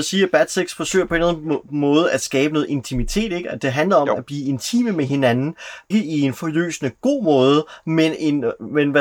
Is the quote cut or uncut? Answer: cut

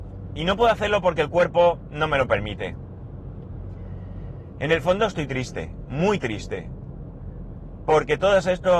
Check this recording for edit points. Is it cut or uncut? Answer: uncut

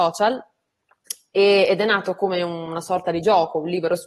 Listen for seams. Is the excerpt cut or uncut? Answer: uncut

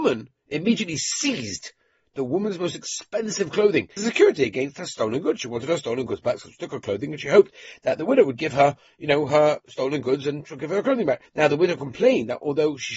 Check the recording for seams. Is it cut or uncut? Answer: cut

